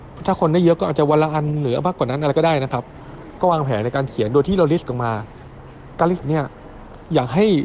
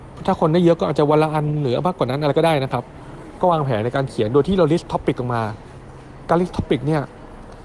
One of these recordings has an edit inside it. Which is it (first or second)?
first